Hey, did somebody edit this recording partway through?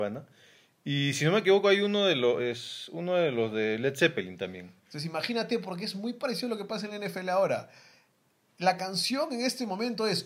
no; 0 cuts

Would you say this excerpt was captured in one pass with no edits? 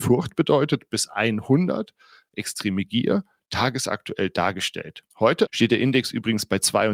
no; 1 cut; at 5.1 s

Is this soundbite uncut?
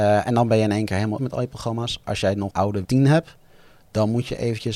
no; 3 cuts; at 1.2 s, 2.5 s, 2.8 s

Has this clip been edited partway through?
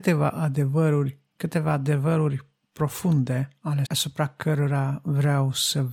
yes; 2 cuts; at 1.4 s, 3.9 s

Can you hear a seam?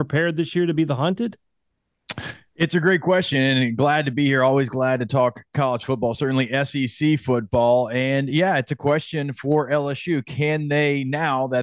no; 0 cuts

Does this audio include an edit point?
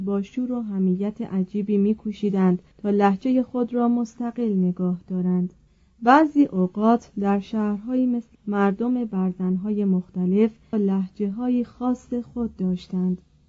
yes; 4 cuts; at 2.7 s, 5.7 s, 8.3 s, 10.7 s

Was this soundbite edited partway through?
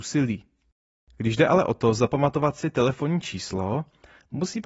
no; 0 cuts

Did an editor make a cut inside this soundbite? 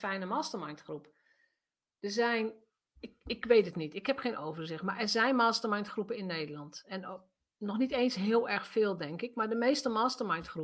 no; 0 cuts

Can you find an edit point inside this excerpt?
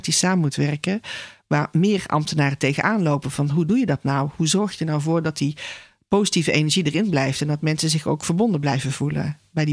no; 0 cuts

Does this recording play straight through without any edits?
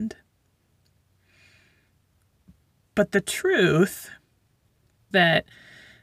no; 1 cut; at 5.1 s

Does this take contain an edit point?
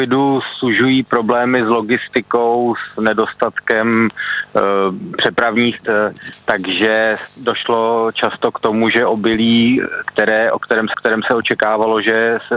yes; 2 cuts; at 5.8 s, 10.9 s

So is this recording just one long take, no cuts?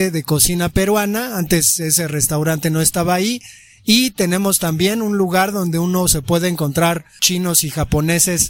no; 1 cut; at 7.2 s

